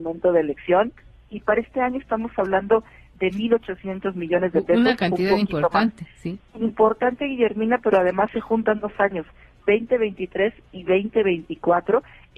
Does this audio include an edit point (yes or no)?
no